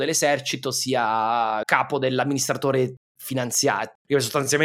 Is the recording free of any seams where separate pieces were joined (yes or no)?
no